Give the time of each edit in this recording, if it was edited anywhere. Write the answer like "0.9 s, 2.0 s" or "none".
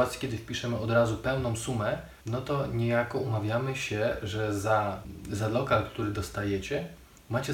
2.2 s